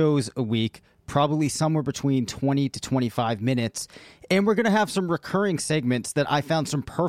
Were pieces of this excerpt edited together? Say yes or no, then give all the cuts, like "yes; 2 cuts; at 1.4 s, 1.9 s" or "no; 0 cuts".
no; 0 cuts